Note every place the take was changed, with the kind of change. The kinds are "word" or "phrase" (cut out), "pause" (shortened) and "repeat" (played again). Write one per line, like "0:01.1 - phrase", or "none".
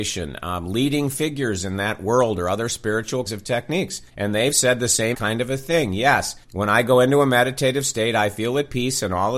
0:03.3 - word
0:04.1 - pause
0:05.1 - word
0:06.4 - pause